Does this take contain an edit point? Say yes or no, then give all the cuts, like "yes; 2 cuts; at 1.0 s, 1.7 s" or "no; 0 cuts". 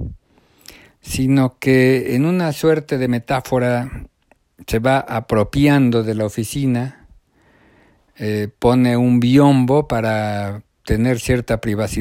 no; 0 cuts